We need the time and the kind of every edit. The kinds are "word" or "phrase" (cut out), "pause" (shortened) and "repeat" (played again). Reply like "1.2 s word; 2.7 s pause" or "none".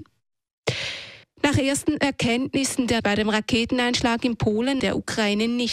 3.0 s phrase; 4.8 s word